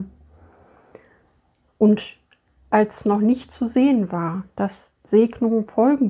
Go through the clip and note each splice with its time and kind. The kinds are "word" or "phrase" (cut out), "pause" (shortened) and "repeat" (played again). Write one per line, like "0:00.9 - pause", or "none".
none